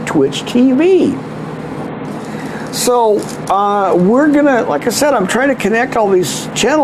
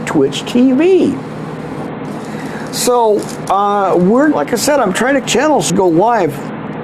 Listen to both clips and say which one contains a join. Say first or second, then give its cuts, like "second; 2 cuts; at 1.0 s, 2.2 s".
second; 3 cuts; at 4.3 s, 5.2 s, 5.7 s